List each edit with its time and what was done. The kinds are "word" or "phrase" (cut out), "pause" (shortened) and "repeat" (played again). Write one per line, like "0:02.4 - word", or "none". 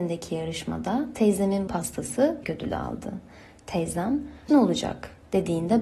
0:01.7 - word
0:02.4 - word
0:04.5 - word